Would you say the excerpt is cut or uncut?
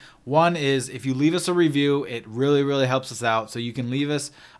uncut